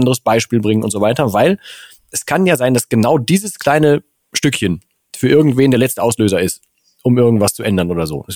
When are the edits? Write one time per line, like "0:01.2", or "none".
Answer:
none